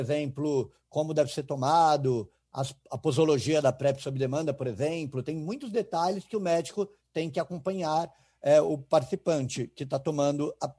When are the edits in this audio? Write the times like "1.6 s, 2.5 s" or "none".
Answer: none

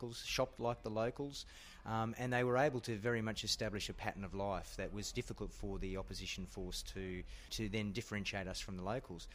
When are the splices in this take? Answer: none

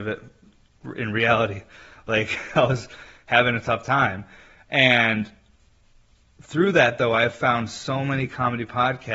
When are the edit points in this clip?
none

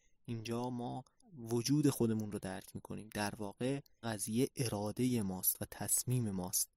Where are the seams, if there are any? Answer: 1.2 s, 4.0 s

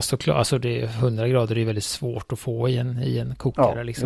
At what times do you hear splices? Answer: none

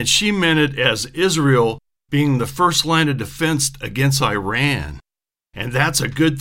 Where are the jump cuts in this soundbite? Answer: none

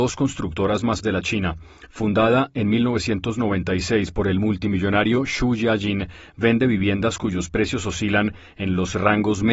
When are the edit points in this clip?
1.0 s

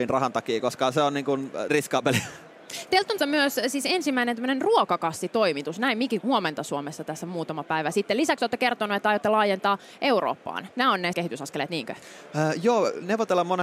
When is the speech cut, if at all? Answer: 1.7 s, 3.2 s, 6.2 s, 10.7 s, 11.1 s

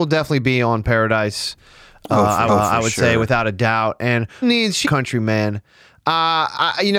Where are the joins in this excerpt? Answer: 2.5 s, 4.4 s, 4.8 s

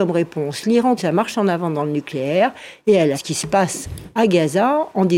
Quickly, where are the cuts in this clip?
1.0 s, 3.1 s

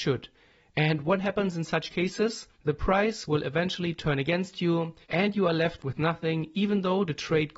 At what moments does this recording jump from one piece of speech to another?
2.5 s, 5.0 s

